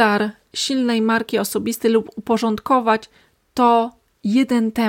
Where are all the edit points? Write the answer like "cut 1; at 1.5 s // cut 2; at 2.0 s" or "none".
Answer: none